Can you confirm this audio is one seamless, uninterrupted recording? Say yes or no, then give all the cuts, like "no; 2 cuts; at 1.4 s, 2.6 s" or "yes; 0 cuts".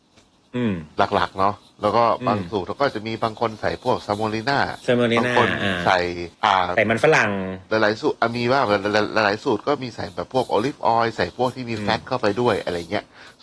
no; 1 cut; at 6.3 s